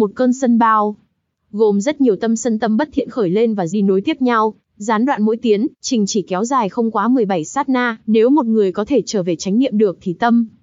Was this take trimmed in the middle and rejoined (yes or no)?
yes